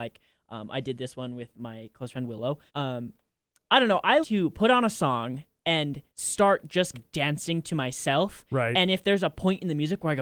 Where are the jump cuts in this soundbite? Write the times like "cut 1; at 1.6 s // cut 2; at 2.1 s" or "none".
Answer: cut 1; at 2.7 s // cut 2; at 4.2 s // cut 3; at 6.1 s // cut 4; at 6.9 s